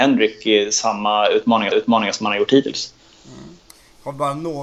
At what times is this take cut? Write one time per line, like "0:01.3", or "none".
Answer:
0:01.7